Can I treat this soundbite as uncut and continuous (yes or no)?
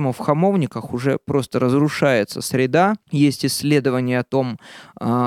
no